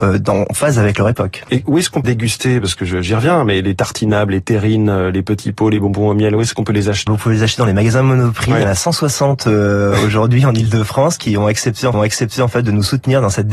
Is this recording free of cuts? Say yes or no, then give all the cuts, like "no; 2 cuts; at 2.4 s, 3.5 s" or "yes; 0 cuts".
no; 4 cuts; at 0.9 s, 2.0 s, 7.1 s, 11.9 s